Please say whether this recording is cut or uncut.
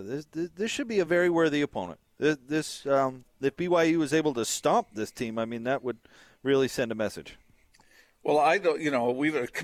uncut